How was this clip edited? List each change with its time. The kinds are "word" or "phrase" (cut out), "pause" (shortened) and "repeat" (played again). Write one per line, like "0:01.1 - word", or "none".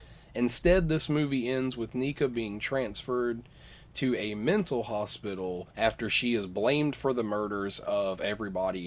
0:05.7 - pause